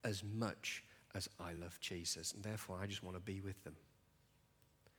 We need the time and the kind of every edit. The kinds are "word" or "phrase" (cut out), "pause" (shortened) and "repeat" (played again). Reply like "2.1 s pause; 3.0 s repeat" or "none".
none